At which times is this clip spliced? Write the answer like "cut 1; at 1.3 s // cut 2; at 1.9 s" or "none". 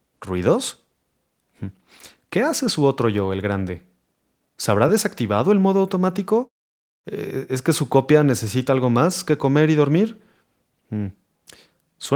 none